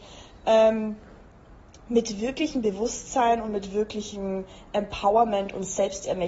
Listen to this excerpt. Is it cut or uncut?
uncut